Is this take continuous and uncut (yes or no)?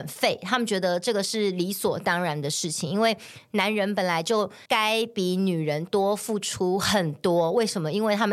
no